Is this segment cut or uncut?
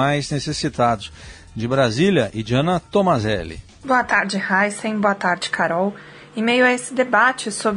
uncut